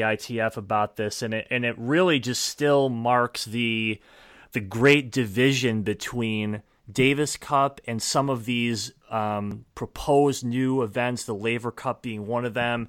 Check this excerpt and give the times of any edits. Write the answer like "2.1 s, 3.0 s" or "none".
none